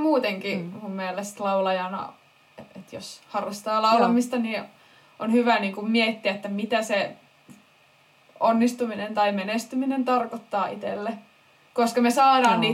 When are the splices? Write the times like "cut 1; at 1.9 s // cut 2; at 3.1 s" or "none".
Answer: none